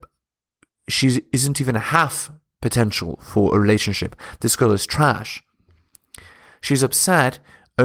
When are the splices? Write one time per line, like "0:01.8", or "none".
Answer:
none